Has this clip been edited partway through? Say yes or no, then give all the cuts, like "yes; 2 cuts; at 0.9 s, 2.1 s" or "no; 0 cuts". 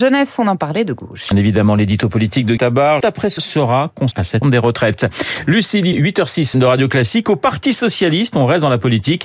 yes; 8 cuts; at 1.3 s, 2.6 s, 3.0 s, 3.4 s, 4.1 s, 4.4 s, 5.9 s, 6.5 s